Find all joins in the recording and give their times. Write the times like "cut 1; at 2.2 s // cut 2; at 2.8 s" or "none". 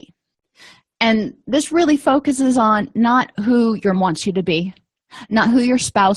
cut 1; at 1.4 s // cut 2; at 3.3 s // cut 3; at 3.9 s